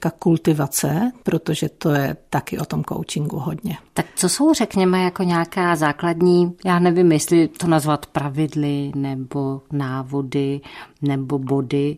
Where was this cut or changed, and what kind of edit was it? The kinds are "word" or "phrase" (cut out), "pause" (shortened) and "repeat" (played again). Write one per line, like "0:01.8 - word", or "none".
none